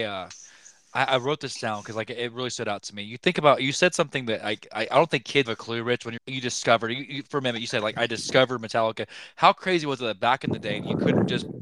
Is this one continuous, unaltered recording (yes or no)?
no